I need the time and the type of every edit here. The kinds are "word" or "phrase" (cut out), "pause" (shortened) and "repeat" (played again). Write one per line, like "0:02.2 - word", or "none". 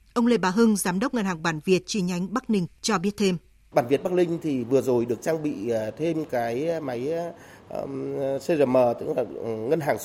none